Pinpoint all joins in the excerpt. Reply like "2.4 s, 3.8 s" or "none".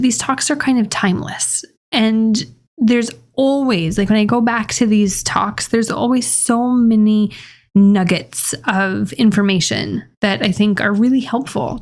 none